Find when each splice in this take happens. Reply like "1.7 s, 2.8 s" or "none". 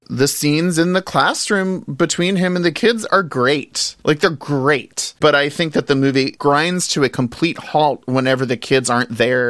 none